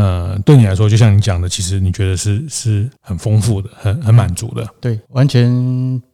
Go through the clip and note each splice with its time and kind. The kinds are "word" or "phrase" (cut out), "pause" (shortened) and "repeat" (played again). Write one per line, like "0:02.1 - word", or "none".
0:05.0 - word